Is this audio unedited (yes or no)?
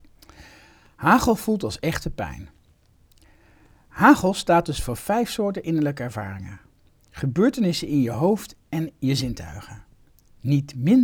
yes